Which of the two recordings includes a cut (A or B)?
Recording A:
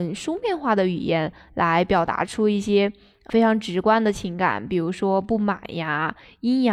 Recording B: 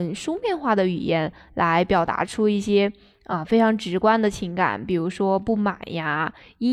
A